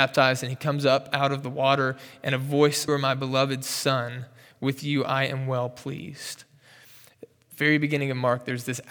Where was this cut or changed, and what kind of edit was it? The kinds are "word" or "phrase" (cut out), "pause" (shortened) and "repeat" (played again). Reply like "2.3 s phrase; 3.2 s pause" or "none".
2.9 s phrase